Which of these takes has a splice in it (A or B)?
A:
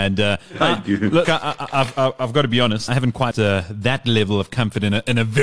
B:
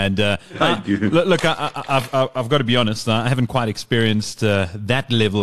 A